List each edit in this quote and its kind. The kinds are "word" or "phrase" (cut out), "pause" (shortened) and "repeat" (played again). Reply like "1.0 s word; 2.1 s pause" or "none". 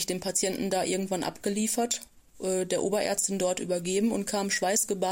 none

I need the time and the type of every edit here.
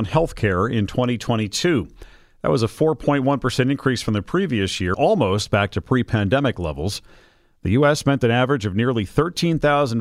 4.9 s word

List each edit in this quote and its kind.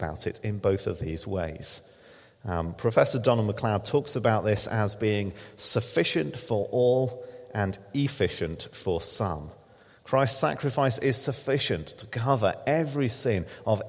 none

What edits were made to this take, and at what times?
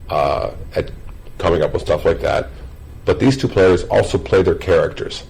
none

